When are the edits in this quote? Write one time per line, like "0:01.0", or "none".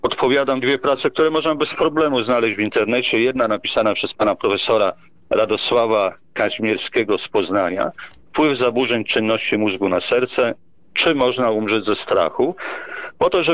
none